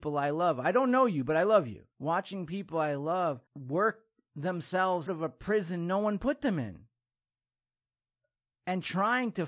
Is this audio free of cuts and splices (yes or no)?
no